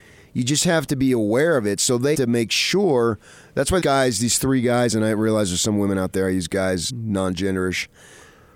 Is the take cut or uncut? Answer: cut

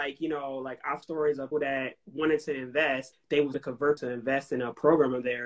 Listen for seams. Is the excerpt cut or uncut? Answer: cut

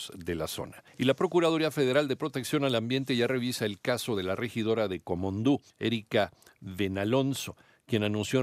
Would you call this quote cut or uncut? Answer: cut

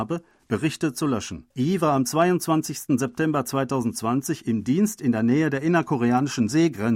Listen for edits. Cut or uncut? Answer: cut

